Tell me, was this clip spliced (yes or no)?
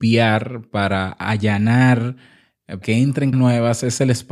yes